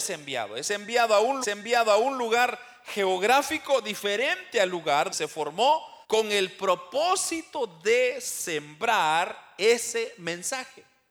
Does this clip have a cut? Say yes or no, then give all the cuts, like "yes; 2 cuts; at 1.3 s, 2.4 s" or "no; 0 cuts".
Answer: yes; 3 cuts; at 1.4 s, 5.1 s, 6.0 s